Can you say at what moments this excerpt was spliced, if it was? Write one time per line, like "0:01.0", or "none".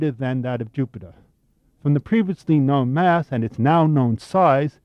none

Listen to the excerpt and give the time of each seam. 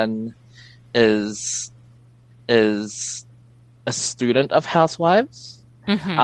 0:02.3

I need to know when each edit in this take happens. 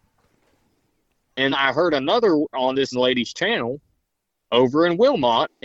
0:01.5
0:02.5
0:02.9

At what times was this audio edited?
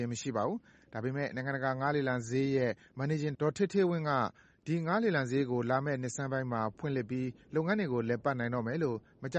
0:03.3

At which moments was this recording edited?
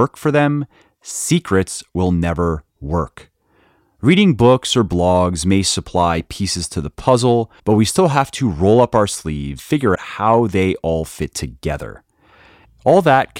0:07.6
0:09.6
0:10.0

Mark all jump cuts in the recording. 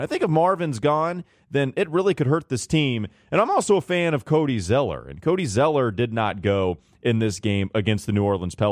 none

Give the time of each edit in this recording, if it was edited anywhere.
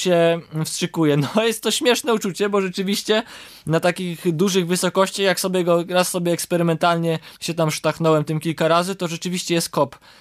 0:07.4

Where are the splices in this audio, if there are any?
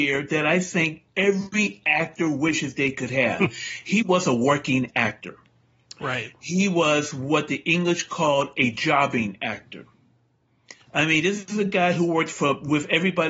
0:10.8

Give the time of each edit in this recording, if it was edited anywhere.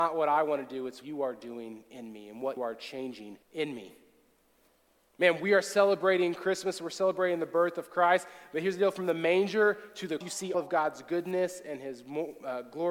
0:01.0
0:02.6
0:03.4
0:10.2
0:10.5

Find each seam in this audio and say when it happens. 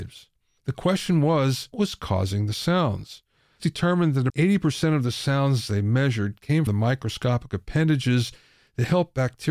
0:01.7
0:03.6
0:04.3
0:06.7

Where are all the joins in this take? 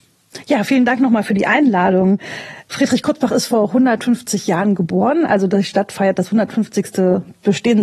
none

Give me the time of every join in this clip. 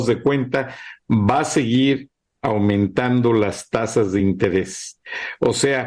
none

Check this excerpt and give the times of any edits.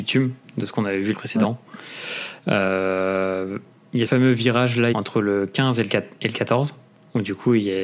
0:01.1
0:04.1
0:04.9

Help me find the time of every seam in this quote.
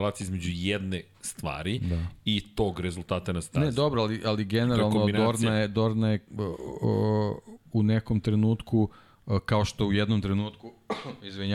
0:06.3

